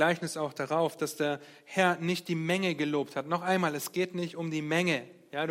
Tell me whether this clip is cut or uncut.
uncut